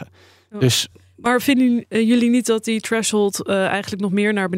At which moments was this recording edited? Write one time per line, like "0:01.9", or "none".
none